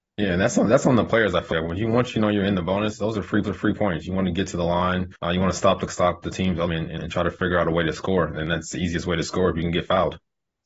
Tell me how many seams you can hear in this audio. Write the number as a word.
six